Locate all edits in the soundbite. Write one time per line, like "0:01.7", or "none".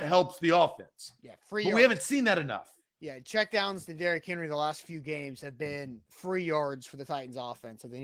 none